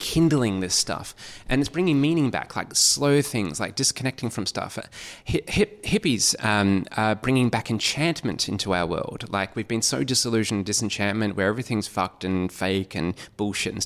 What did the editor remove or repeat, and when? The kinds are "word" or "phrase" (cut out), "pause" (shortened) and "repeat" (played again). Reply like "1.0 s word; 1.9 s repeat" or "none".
none